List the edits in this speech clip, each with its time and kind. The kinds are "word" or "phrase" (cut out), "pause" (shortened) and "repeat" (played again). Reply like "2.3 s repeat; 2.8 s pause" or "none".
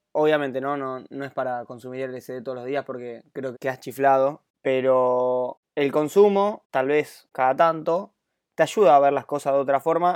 3.5 s word